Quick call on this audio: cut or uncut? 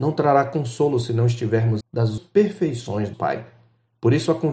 cut